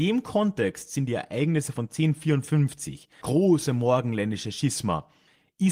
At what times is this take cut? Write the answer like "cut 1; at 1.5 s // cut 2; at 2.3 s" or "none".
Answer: cut 1; at 3.2 s